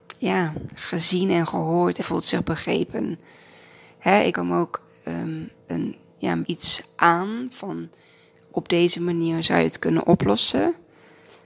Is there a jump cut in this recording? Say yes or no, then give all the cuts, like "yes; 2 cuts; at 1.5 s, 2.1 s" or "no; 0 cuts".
yes; 3 cuts; at 2.0 s, 4.3 s, 6.4 s